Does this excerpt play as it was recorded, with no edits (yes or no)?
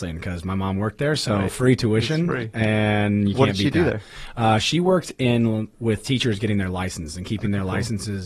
yes